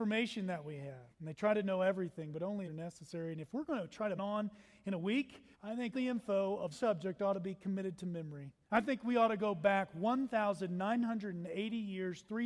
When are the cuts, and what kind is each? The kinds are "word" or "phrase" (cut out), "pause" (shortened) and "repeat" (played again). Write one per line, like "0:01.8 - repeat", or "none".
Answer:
0:01.1 - pause
0:02.7 - phrase
0:04.2 - phrase
0:05.5 - pause
0:05.9 - word
0:06.7 - word
0:08.6 - pause

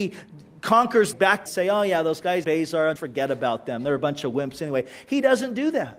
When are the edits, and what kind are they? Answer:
0:01.1 - phrase
0:01.5 - phrase
0:02.4 - word
0:03.0 - word

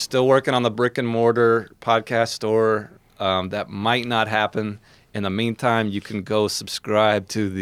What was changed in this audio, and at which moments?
none

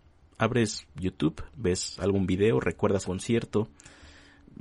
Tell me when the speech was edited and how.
0:03.0 - word

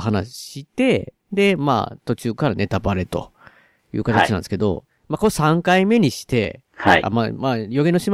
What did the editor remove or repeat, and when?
0:01.2 - pause
0:04.9 - pause
0:06.7 - pause

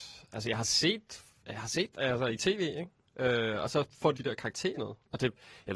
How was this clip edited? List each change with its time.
0:01.9 - word
0:04.1 - phrase
0:04.7 - word

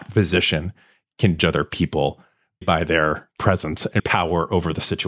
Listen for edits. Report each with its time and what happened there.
0:01.4 - word
0:02.6 - word
0:04.0 - word

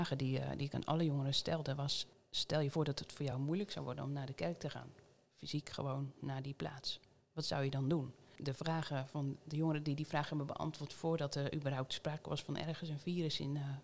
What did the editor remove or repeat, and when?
none

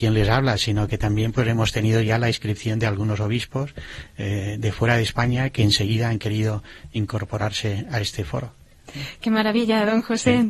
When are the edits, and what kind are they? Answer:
none

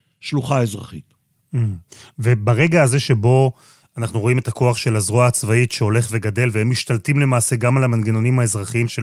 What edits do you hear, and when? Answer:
none

